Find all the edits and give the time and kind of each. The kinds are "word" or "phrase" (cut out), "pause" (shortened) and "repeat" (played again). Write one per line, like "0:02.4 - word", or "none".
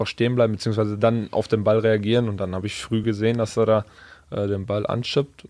none